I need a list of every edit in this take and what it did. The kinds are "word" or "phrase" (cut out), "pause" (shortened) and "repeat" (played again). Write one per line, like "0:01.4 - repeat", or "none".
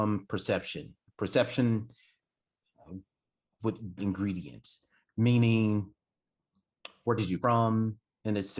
0:03.6 - word
0:04.0 - word
0:07.4 - word